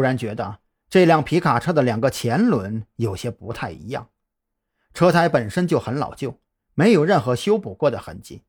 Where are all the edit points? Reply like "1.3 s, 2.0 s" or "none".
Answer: none